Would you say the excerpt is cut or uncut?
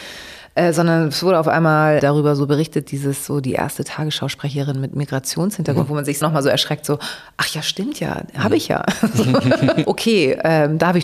cut